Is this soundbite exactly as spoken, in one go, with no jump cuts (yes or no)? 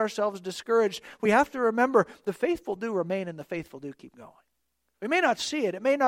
yes